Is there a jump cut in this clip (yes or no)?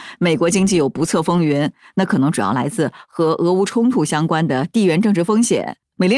no